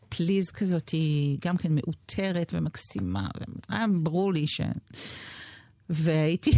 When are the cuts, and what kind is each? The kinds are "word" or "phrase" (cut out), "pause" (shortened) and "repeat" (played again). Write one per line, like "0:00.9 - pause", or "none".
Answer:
none